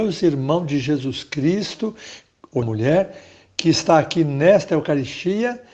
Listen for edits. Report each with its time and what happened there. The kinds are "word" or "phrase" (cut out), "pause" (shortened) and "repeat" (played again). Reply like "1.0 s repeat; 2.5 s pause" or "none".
2.6 s word